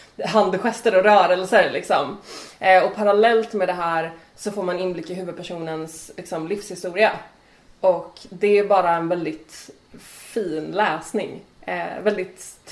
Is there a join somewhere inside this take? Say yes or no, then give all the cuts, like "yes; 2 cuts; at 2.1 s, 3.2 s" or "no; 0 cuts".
no; 0 cuts